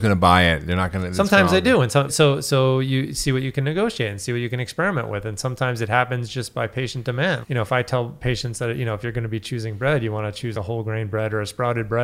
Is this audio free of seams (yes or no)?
no